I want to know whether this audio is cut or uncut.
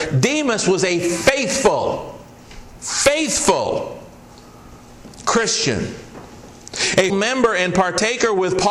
cut